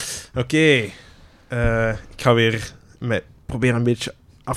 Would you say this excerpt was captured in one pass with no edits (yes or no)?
yes